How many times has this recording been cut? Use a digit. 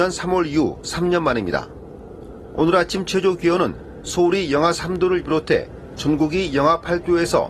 0